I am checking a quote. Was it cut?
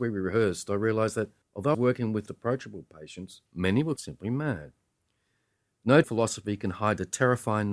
yes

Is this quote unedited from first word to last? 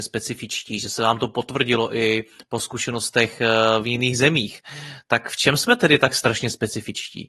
yes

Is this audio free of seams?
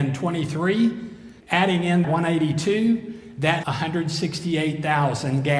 no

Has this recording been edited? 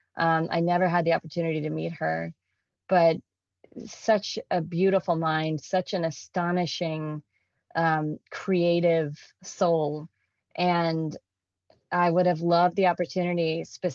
no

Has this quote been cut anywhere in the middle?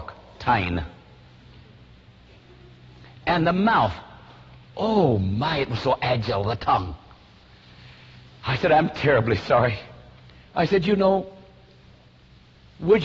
no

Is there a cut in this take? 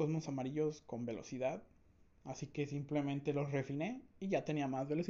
no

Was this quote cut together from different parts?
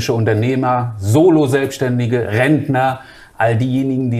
no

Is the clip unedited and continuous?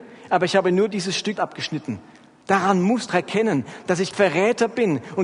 no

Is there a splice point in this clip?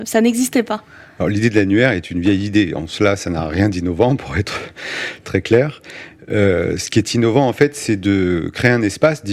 no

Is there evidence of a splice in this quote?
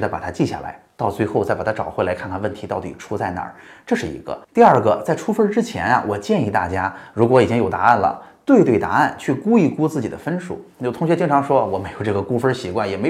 yes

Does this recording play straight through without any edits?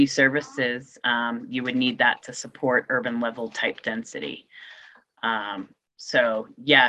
yes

